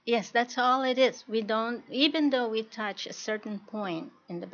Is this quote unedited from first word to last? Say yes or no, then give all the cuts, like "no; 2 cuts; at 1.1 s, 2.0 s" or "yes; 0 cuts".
yes; 0 cuts